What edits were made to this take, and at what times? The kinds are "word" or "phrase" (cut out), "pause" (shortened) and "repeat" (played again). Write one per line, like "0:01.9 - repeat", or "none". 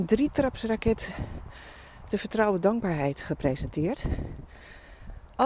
0:02.1 - word

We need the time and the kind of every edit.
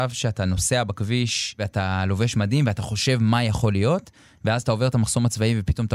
none

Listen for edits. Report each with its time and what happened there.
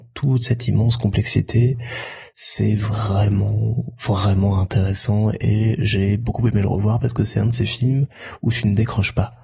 none

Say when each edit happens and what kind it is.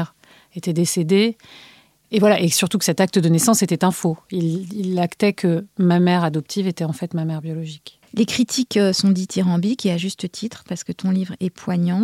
none

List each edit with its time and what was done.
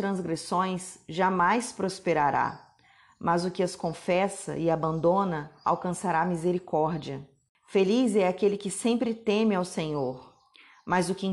none

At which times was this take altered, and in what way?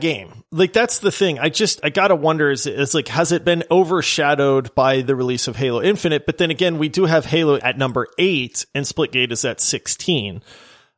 0:01.8 - word
0:07.6 - word

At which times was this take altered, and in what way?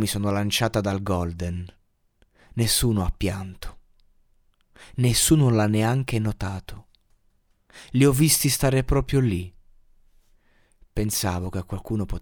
none

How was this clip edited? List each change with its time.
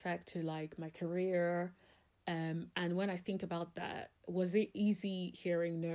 none

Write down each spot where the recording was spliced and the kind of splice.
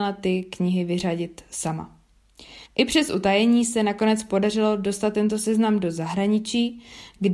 0:02.7 - pause

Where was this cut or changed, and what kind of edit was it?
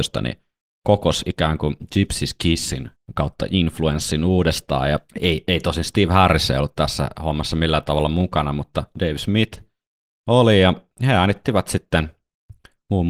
0:05.1 - pause

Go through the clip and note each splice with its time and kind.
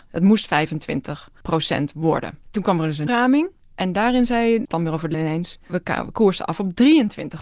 0:02.4 - pause
0:03.1 - word
0:04.6 - phrase
0:05.1 - phrase

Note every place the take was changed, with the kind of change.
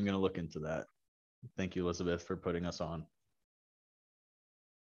none

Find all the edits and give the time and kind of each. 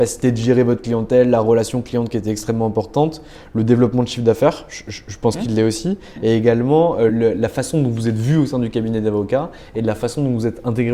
0:07.1 - word

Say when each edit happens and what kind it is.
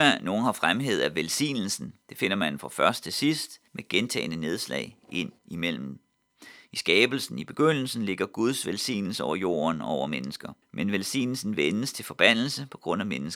0:02.0 - pause
0:03.7 - pause
0:05.4 - pause
0:10.6 - pause

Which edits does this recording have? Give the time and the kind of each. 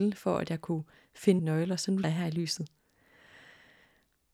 0:01.4 - word
0:02.0 - word

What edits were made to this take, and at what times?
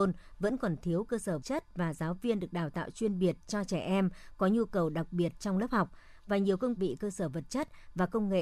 0:01.4 - word
0:06.8 - phrase

